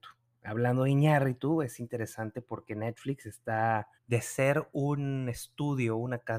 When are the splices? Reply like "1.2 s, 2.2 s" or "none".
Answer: 3.9 s